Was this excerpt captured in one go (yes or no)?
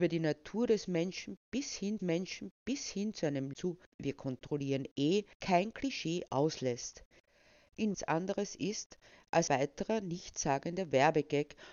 no